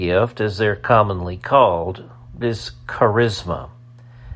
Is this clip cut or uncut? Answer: cut